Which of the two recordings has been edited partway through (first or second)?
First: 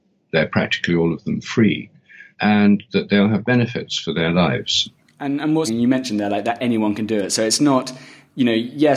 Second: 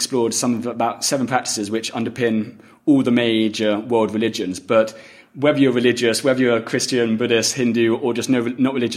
first